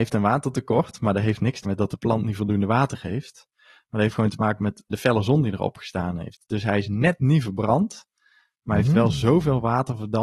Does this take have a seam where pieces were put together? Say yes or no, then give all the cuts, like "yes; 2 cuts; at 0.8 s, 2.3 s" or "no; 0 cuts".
yes; 2 cuts; at 1.6 s, 4.9 s